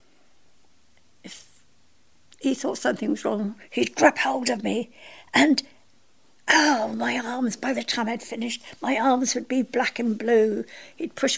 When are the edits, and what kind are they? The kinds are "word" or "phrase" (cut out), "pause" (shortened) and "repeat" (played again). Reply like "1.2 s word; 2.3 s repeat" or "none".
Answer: none